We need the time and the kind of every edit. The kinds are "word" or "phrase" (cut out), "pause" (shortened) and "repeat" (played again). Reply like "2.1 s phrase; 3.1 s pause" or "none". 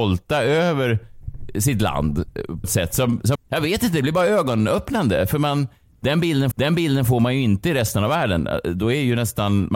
2.6 s word; 3.4 s word; 6.5 s repeat